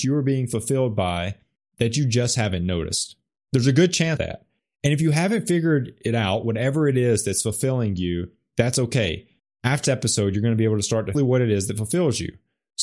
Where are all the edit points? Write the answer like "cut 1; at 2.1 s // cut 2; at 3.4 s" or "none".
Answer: cut 1; at 4.2 s // cut 2; at 9.8 s // cut 3; at 11.1 s